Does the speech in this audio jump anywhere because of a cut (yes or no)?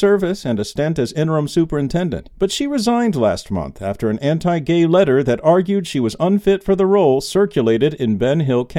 yes